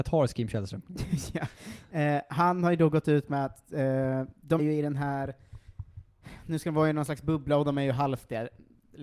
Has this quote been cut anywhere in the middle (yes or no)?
yes